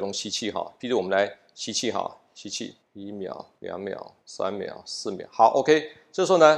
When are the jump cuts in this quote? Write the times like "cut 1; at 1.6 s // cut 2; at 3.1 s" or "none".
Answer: cut 1; at 2.8 s // cut 2; at 3.6 s // cut 3; at 4.2 s